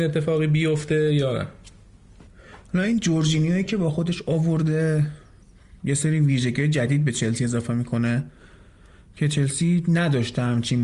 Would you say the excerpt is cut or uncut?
uncut